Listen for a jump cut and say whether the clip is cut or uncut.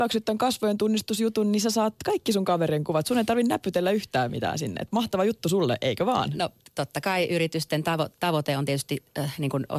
uncut